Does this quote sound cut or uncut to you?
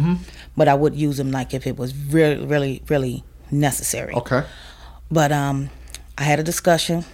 uncut